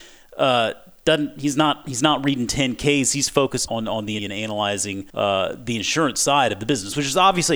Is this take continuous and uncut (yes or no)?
no